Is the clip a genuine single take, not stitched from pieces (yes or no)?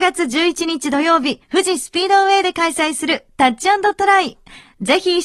no